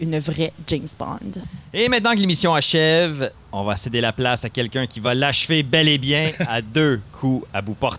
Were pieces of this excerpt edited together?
no; 0 cuts

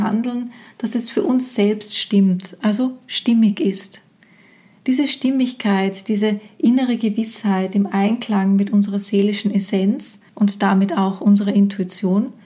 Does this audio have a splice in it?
no; 0 cuts

